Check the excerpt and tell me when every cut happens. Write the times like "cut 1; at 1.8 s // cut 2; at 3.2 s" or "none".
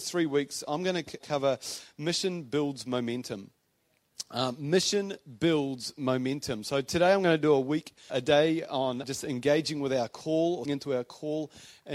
cut 1; at 1.2 s // cut 2; at 8.1 s // cut 3; at 9.0 s // cut 4; at 10.6 s

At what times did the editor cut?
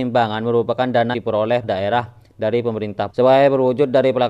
cut 1; at 1.1 s // cut 2; at 1.6 s // cut 3; at 3.1 s

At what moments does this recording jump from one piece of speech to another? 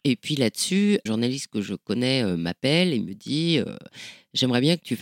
cut 1; at 1.1 s

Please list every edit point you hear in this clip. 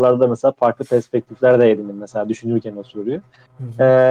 none

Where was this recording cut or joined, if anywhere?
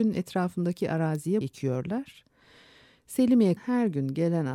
cut 1; at 1.4 s // cut 2; at 3.6 s

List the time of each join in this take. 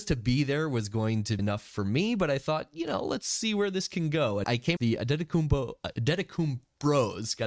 cut 1; at 1.4 s // cut 2; at 4.4 s // cut 3; at 4.8 s

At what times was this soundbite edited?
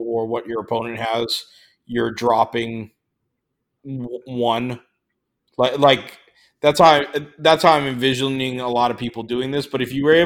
none

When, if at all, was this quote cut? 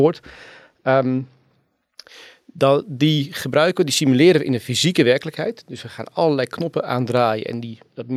none

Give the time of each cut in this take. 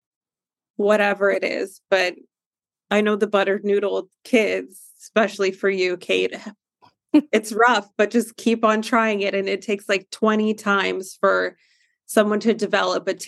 none

